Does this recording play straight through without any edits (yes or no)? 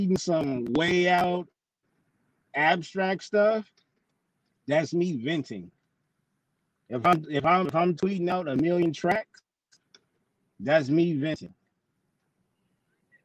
yes